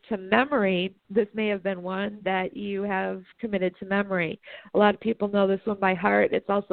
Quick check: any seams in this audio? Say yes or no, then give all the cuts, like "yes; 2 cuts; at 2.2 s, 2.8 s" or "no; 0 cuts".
yes; 1 cut; at 3.3 s